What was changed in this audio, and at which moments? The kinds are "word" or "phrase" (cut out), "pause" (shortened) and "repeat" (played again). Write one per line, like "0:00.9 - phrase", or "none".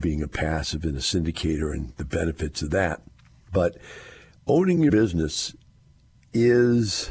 0:04.9 - word